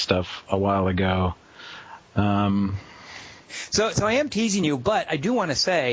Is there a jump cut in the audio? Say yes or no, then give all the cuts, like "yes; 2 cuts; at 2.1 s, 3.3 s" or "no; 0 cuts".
no; 0 cuts